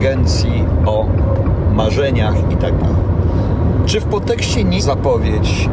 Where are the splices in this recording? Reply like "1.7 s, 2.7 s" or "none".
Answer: 4.8 s